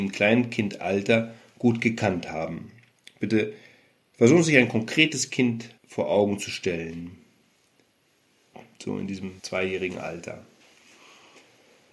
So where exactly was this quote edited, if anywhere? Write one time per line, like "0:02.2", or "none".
0:05.8
0:09.4